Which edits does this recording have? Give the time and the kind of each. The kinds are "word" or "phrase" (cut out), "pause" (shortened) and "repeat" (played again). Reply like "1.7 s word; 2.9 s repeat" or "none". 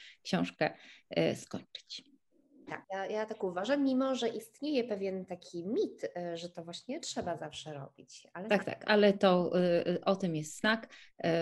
2.8 s pause